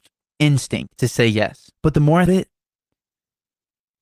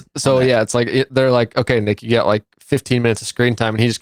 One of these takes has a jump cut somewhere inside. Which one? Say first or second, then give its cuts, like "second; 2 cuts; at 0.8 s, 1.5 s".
first; 3 cuts; at 1.0 s, 1.8 s, 2.3 s